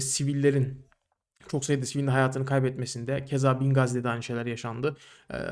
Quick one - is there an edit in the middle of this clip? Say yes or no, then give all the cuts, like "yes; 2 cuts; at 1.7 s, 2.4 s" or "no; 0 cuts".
no; 0 cuts